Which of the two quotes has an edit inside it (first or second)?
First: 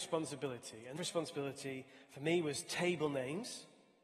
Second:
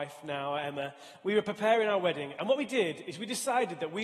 first